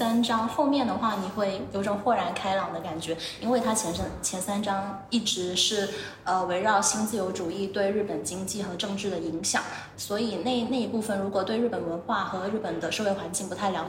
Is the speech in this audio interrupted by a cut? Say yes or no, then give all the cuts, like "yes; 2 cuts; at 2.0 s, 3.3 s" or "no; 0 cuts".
yes; 1 cut; at 9.9 s